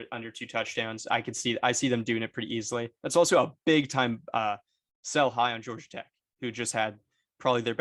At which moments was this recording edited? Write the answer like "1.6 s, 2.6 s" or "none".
none